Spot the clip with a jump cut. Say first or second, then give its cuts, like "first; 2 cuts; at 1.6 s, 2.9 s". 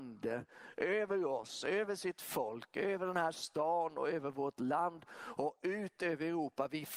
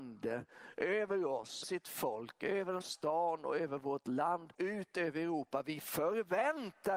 second; 3 cuts; at 1.6 s, 2.8 s, 4.5 s